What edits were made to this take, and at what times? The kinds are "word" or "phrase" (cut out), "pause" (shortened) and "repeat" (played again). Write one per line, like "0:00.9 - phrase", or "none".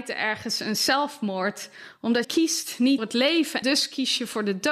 0:02.2 - word
0:03.0 - word
0:03.6 - word